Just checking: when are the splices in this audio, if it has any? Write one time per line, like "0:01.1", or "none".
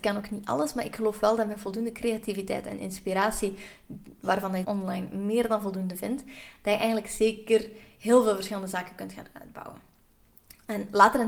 0:04.6